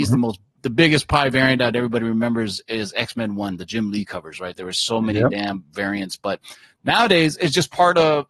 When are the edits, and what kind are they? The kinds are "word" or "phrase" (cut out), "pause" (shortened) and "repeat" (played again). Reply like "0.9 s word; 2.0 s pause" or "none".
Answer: none